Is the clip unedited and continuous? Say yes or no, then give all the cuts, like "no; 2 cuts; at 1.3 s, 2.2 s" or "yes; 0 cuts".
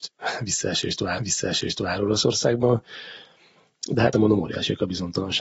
no; 2 cuts; at 1.2 s, 4.1 s